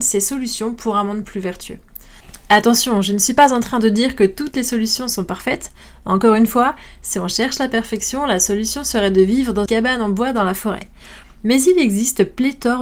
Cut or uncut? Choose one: cut